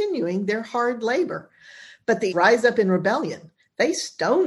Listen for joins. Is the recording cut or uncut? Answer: cut